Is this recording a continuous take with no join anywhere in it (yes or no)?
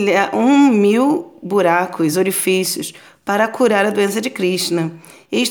yes